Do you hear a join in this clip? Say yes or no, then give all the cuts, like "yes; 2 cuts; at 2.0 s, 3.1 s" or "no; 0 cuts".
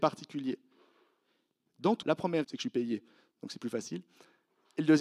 yes; 2 cuts; at 2.0 s, 2.4 s